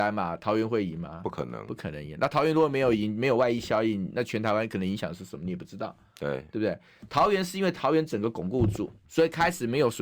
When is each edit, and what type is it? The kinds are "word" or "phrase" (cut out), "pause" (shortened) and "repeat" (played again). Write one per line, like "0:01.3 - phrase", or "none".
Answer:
0:09.1 - word